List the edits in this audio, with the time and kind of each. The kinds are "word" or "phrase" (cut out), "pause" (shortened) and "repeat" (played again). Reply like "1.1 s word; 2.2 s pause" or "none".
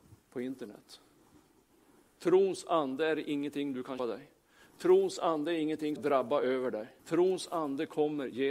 4.0 s word; 6.0 s phrase; 7.0 s pause